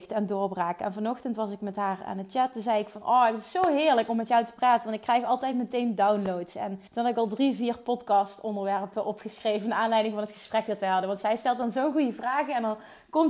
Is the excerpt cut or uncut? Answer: cut